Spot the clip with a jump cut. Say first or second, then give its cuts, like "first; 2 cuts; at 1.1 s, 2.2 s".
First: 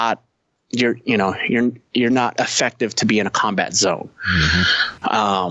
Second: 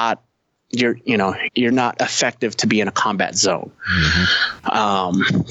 second; 1 cut; at 1.5 s